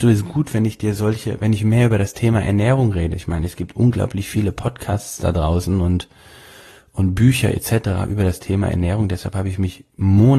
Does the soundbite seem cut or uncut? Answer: uncut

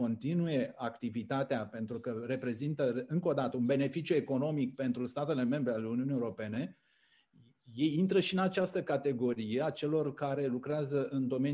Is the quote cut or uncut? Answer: uncut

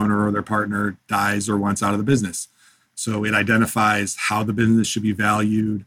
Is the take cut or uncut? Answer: uncut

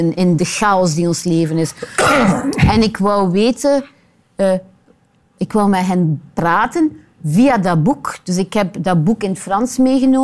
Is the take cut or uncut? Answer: uncut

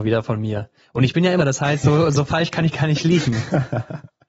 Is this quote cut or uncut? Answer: cut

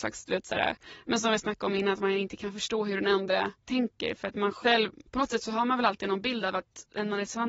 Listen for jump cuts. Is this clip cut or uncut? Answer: cut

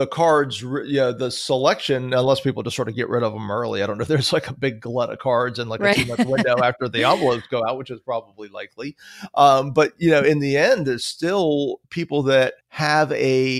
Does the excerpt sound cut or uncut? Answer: cut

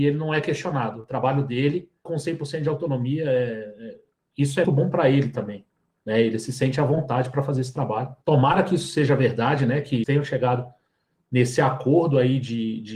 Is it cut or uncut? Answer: cut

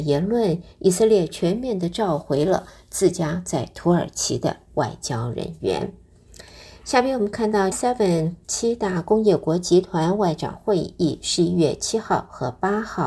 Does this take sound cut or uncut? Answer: cut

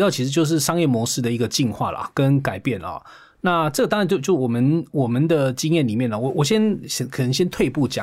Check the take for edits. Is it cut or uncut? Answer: uncut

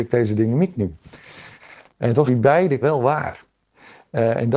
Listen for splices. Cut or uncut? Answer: cut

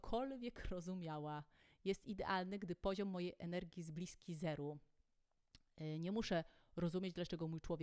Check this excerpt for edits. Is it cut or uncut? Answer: uncut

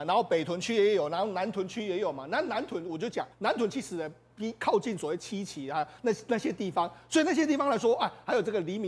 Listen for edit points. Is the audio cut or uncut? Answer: cut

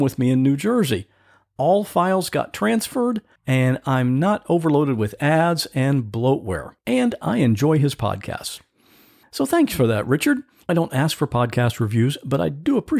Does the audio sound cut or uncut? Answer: cut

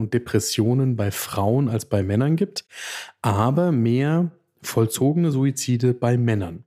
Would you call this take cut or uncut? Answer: uncut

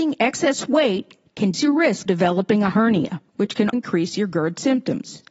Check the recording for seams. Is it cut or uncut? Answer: cut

